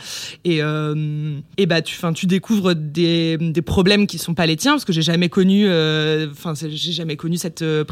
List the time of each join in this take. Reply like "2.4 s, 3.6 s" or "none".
none

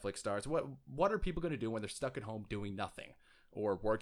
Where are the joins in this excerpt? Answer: none

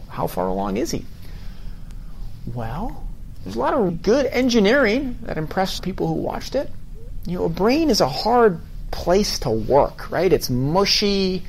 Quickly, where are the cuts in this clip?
3.9 s, 5.8 s

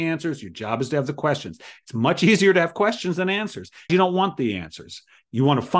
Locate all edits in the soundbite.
3.9 s

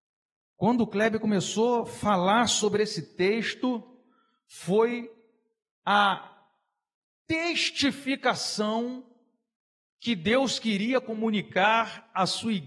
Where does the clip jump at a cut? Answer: none

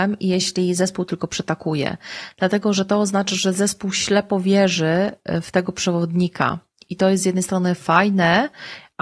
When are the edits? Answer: none

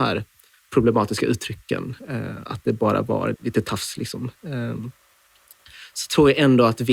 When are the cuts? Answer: 3.3 s

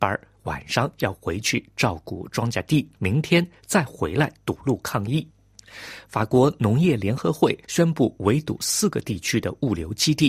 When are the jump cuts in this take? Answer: 2.9 s, 7.6 s

